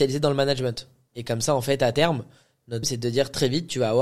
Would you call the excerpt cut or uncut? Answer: cut